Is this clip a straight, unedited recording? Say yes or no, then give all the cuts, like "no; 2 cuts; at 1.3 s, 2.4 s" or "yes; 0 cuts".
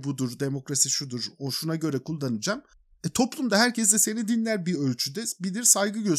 yes; 0 cuts